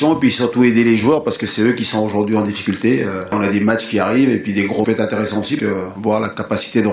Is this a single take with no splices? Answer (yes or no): no